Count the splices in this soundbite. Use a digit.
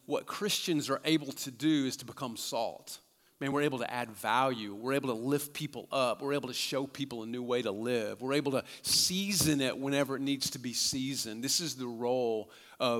0